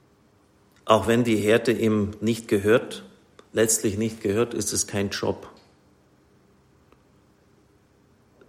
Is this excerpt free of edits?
yes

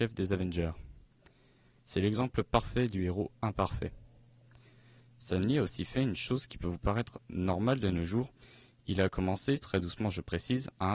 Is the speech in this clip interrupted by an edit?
no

